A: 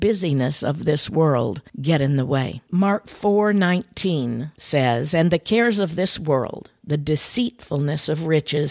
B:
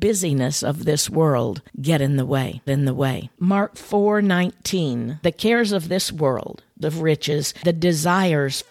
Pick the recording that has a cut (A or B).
B